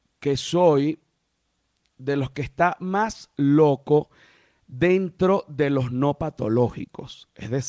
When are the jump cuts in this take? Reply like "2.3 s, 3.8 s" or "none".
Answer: none